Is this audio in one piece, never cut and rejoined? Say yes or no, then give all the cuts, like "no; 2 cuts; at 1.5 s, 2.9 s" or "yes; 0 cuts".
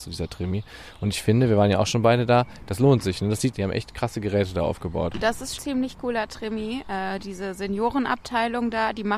no; 2 cuts; at 3.5 s, 5.6 s